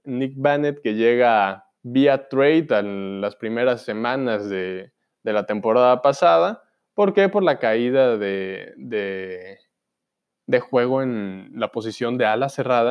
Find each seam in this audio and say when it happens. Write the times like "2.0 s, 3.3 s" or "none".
1.8 s